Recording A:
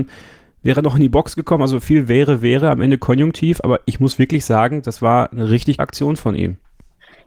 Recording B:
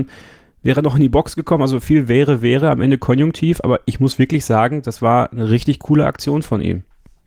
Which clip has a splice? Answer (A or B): A